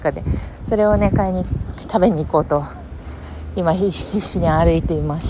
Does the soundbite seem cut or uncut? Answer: uncut